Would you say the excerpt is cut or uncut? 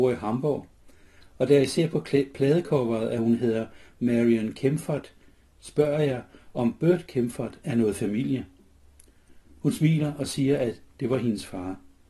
uncut